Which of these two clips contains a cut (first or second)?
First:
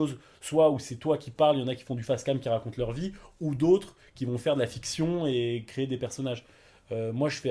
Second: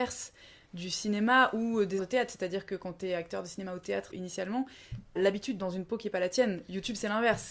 second